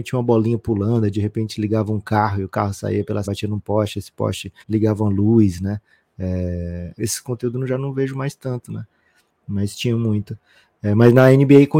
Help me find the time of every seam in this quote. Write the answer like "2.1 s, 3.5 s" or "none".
3.2 s, 4.6 s, 7.0 s